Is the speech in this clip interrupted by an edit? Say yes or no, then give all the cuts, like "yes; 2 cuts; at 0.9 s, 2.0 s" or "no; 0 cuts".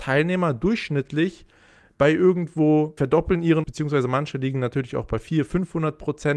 yes; 2 cuts; at 3.0 s, 3.6 s